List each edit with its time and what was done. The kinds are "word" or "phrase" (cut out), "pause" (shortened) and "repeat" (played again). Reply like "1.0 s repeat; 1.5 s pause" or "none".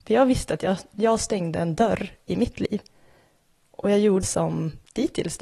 4.2 s word